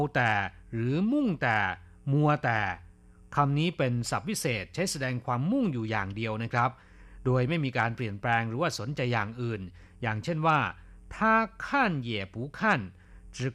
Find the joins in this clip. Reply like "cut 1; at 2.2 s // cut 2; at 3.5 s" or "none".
none

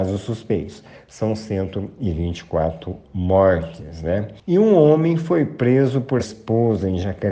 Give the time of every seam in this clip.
cut 1; at 6.2 s

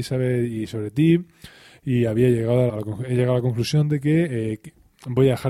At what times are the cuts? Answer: cut 1; at 2.7 s

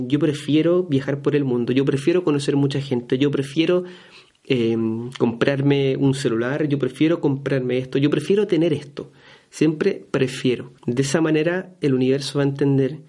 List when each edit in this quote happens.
cut 1; at 10.8 s

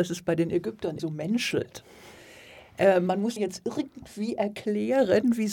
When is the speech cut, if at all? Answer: cut 1; at 1.0 s // cut 2; at 3.4 s

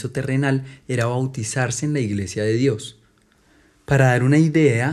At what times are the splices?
none

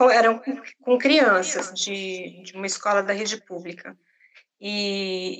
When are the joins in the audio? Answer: none

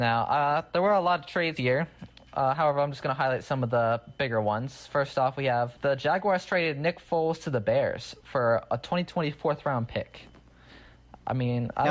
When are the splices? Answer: cut 1; at 1.6 s // cut 2; at 5.8 s

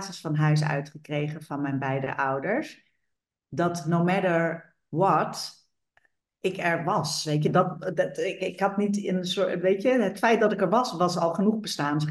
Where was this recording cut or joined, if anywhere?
none

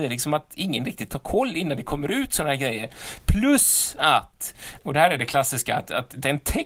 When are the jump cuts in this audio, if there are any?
cut 1; at 4.8 s

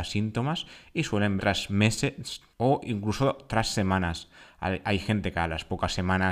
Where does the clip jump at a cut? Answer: cut 1; at 1.4 s // cut 2; at 2.5 s

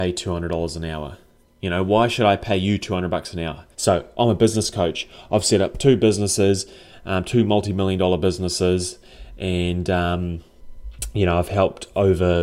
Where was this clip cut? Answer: cut 1; at 1.4 s // cut 2; at 3.7 s

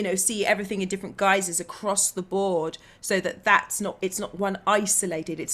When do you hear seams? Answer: none

